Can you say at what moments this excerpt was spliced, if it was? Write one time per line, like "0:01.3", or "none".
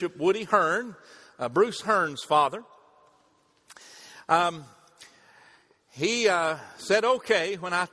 none